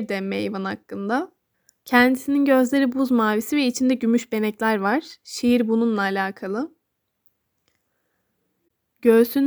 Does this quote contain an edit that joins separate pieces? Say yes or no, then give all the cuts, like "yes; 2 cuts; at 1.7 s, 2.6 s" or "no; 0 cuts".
yes; 1 cut; at 1.5 s